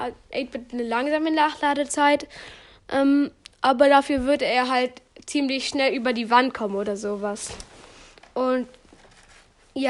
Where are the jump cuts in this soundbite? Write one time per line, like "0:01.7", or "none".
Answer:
none